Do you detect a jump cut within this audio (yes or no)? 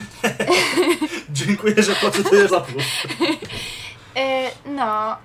yes